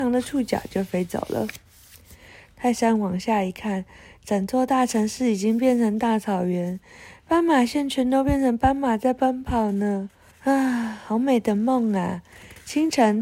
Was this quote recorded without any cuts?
no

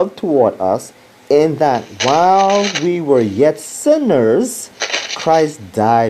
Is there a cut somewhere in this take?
no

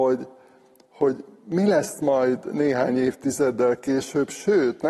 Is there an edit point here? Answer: no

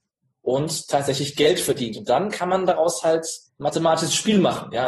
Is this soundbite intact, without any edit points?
no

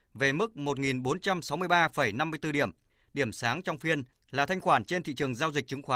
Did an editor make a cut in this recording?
no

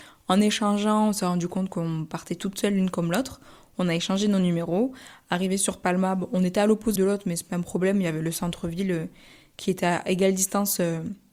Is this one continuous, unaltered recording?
no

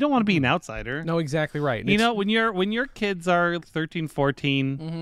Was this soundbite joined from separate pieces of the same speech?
yes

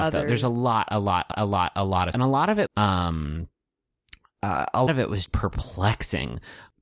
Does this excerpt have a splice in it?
yes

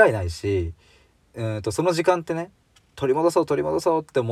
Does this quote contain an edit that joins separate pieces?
no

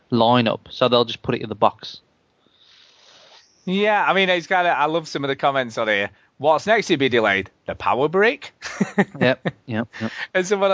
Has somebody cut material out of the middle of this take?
no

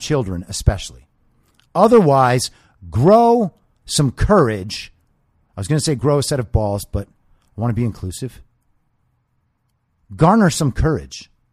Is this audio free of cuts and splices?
yes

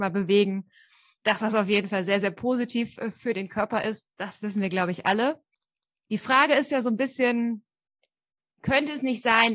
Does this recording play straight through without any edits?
yes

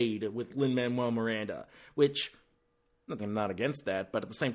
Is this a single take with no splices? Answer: no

